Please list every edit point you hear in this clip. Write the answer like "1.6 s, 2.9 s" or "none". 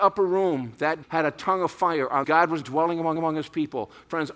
1.0 s, 2.2 s, 2.6 s, 3.2 s